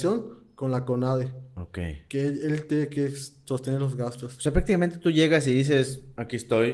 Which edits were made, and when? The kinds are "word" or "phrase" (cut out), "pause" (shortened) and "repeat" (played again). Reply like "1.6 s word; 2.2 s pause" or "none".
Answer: none